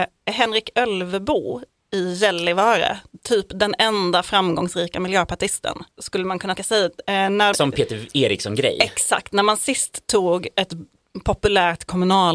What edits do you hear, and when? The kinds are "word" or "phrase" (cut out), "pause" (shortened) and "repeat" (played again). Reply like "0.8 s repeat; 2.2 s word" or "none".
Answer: 5.9 s pause; 6.6 s word; 7.5 s word